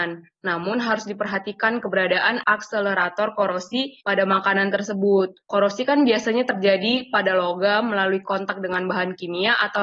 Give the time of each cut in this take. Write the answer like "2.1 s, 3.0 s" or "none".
4.0 s, 5.4 s